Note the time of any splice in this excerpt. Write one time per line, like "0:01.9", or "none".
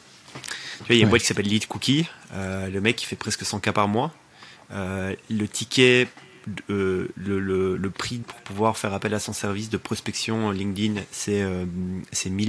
0:08.2

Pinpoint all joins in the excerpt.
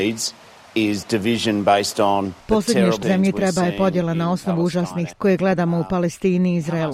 0:02.4
0:03.0
0:05.1

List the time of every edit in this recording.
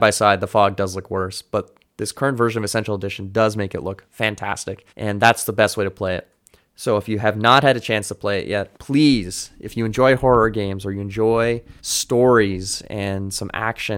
0:04.9
0:06.6
0:08.7
0:11.8

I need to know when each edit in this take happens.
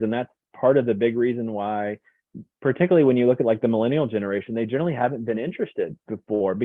none

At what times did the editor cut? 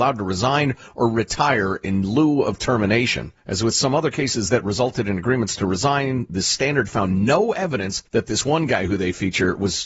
0:03.4
0:08.1

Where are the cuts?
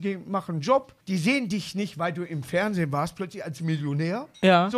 0:01.0

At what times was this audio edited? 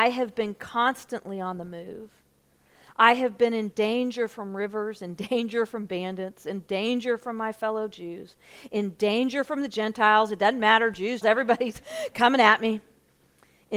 0:11.2

